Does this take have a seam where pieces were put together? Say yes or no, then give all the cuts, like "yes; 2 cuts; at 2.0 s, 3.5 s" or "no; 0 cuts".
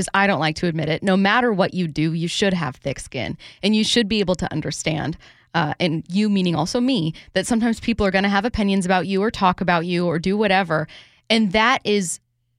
no; 0 cuts